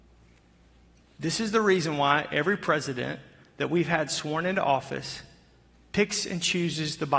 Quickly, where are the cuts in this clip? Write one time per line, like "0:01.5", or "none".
none